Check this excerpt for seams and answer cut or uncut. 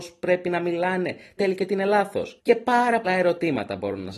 cut